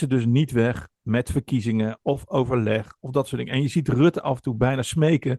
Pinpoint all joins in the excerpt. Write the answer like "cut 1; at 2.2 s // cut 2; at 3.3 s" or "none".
none